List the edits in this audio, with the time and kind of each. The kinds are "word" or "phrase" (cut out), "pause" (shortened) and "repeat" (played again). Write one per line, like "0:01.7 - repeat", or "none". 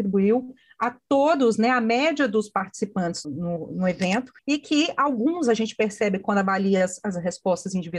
0:03.2 - word
0:04.4 - pause